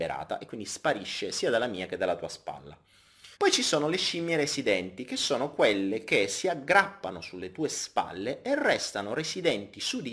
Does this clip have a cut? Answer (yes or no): yes